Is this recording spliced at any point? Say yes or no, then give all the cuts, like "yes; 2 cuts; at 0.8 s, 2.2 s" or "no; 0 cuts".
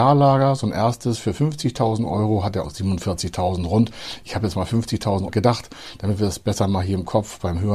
yes; 2 cuts; at 2.6 s, 5.3 s